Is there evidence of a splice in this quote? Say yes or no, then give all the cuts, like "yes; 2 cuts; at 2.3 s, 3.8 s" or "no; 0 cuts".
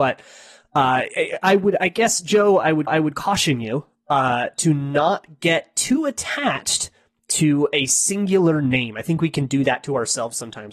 yes; 1 cut; at 2.9 s